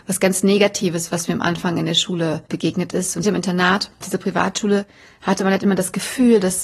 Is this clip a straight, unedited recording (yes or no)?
no